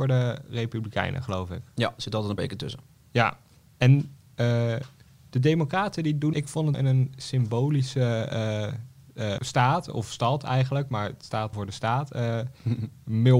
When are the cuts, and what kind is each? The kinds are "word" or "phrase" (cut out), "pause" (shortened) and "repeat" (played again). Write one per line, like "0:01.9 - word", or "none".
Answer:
0:02.4 - word
0:06.3 - word
0:06.7 - word
0:09.4 - word
0:10.0 - word
0:11.5 - word